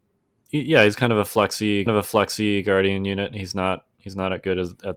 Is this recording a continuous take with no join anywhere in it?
no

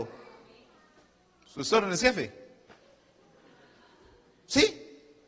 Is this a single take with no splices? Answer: yes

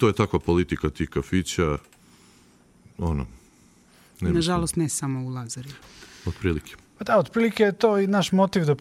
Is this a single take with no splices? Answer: yes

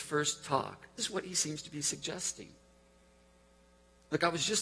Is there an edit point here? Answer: yes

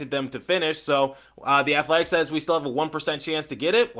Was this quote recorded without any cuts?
yes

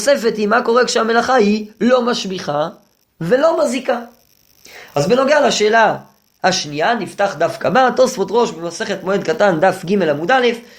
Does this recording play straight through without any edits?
yes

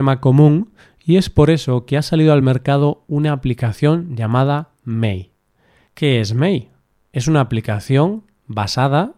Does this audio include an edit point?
no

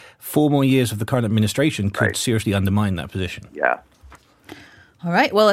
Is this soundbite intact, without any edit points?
yes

